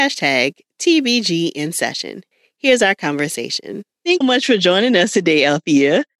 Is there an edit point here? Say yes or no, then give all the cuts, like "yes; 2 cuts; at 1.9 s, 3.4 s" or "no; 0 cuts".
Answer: yes; 2 cuts; at 2.3 s, 4.2 s